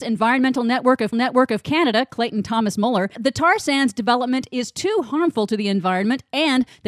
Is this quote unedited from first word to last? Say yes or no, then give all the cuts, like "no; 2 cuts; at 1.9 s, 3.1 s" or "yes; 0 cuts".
no; 2 cuts; at 1.1 s, 3.2 s